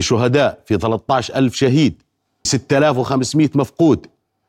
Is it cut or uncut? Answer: cut